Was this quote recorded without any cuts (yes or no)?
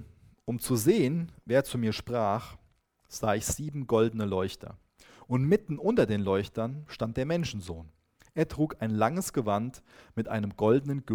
yes